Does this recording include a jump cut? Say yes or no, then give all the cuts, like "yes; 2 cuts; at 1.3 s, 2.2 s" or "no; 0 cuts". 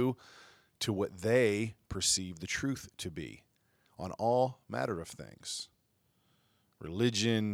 no; 0 cuts